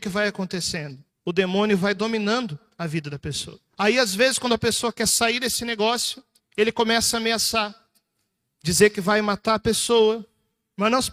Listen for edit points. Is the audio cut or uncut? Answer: cut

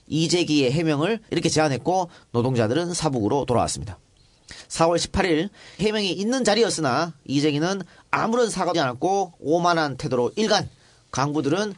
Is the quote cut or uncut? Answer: cut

